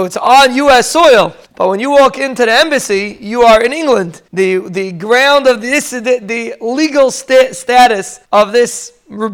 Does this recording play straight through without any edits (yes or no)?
no